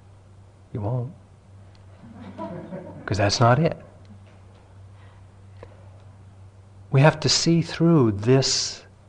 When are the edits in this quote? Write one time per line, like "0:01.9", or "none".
none